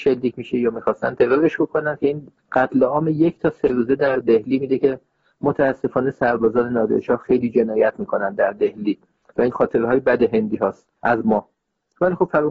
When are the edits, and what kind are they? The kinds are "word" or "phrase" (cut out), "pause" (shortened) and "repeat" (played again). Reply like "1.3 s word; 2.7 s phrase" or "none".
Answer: 2.4 s word; 9.5 s word; 11.0 s pause